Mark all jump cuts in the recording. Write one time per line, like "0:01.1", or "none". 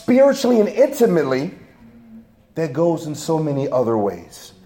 none

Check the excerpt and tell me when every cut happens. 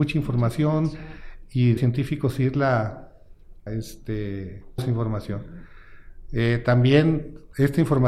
0:01.8
0:03.7
0:04.8

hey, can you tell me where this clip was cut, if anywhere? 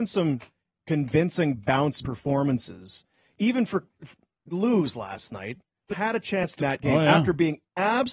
0:02.0
0:04.5
0:05.9
0:06.6

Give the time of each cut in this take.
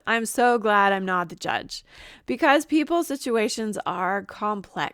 none

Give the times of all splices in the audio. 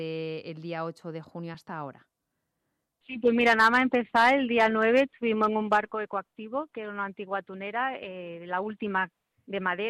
none

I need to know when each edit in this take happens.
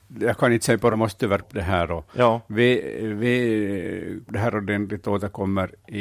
0:00.9
0:01.4
0:04.3

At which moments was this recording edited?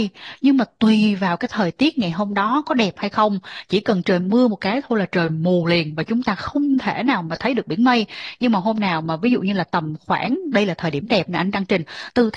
none

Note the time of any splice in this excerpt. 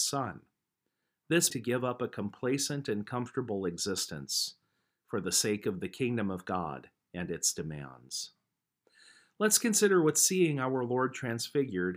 0:01.5

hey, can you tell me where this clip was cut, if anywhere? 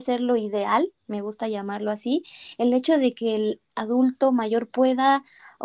none

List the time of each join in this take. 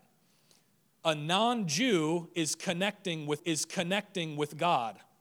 0:03.4

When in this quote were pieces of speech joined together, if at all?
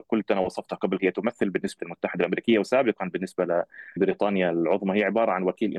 0:01.0
0:01.8
0:04.0

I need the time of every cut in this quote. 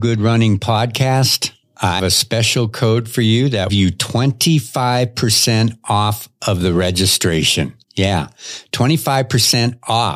0:02.0
0:03.7
0:07.8

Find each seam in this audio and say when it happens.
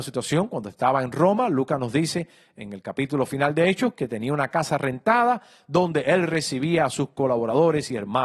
none

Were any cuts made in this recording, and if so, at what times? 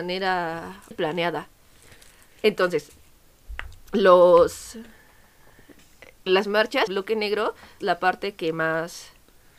0:00.9
0:06.3
0:06.9
0:07.8

